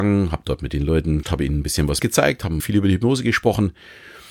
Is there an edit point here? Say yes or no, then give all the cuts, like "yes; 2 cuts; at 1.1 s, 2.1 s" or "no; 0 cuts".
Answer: yes; 3 cuts; at 1.2 s, 2.0 s, 2.6 s